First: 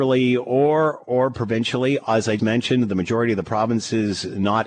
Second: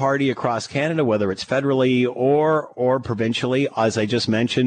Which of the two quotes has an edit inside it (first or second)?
first